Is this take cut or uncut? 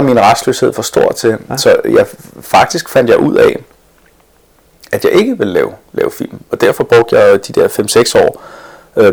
uncut